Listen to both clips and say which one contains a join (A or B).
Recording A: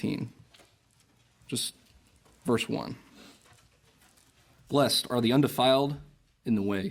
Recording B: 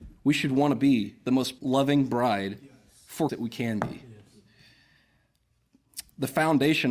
B